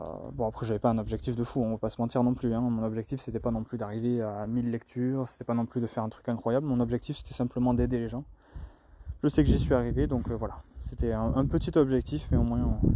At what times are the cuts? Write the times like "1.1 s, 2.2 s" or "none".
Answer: none